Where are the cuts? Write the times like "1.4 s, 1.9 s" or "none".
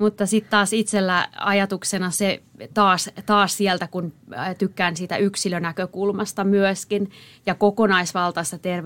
none